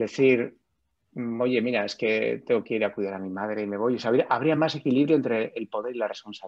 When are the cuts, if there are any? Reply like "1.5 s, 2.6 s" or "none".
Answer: none